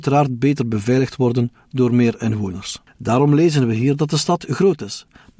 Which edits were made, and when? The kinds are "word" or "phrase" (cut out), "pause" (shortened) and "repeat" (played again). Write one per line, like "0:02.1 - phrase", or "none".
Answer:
0:02.9 - pause